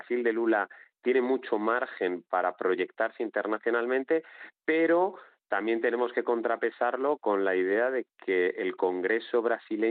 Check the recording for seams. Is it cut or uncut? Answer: uncut